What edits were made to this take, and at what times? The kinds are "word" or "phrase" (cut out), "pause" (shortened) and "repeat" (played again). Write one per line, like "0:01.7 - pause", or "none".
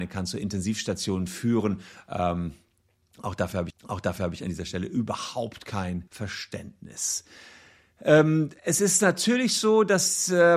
0:03.7 - repeat
0:06.1 - pause
0:08.6 - pause